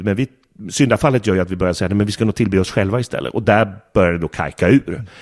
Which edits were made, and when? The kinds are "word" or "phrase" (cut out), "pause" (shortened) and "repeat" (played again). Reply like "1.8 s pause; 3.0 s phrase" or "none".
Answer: none